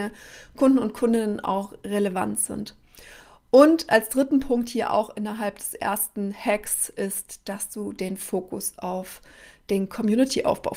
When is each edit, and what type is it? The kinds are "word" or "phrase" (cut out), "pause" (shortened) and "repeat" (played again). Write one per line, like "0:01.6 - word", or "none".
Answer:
none

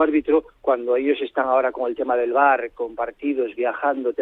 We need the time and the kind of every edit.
none

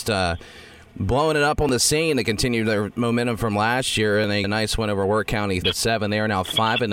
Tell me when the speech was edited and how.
0:04.4 - word
0:05.6 - word

